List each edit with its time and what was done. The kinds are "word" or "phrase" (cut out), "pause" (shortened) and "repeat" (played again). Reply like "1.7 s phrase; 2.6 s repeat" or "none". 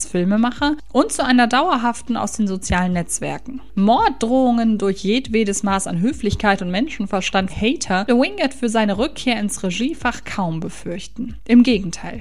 7.5 s word; 8.1 s word

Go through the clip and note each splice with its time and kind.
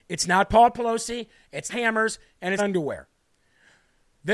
1.7 s word; 2.6 s word

